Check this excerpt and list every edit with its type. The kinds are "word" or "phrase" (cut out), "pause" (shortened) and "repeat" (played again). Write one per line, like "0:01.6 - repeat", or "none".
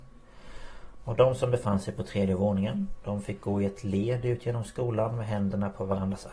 none